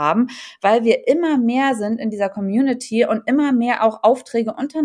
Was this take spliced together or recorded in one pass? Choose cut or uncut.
uncut